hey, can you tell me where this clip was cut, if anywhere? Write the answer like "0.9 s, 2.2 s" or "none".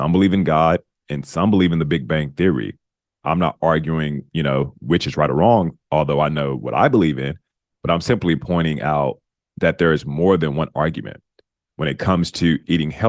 none